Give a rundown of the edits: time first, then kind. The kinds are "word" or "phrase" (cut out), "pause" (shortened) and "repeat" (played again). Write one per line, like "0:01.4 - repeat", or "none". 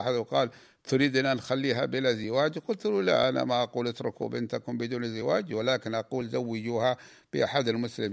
none